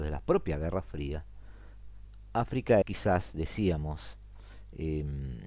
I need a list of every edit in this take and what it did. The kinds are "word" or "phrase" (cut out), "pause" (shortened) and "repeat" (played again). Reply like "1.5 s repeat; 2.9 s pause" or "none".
2.8 s word